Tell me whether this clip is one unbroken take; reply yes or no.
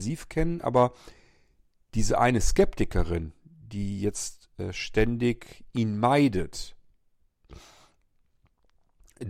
yes